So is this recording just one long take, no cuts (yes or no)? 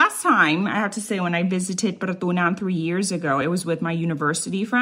yes